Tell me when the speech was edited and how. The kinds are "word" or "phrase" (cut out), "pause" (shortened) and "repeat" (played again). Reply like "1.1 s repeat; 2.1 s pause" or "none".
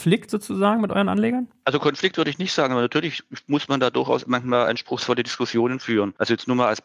none